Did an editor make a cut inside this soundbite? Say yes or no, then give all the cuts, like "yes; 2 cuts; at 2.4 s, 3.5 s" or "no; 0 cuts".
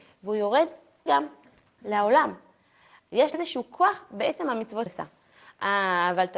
yes; 3 cuts; at 1.1 s, 3.3 s, 4.9 s